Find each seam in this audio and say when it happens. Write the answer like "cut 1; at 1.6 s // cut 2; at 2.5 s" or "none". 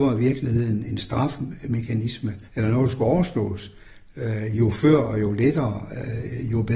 cut 1; at 2.5 s